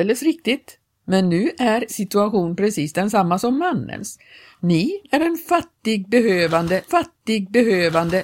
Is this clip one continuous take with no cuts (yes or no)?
no